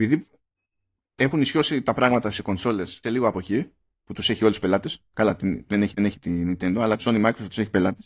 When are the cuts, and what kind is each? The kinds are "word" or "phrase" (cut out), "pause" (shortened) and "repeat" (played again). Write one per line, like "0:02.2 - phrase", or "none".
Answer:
0:03.0 - word
0:03.9 - pause
0:06.0 - repeat
0:07.0 - phrase